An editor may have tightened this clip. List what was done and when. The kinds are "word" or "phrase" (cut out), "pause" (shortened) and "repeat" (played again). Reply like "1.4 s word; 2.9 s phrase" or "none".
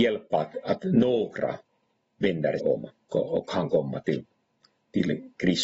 2.6 s word; 3.1 s word